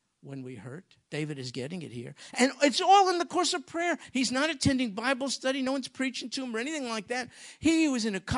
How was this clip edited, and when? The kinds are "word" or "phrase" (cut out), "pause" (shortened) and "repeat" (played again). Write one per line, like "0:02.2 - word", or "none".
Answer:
none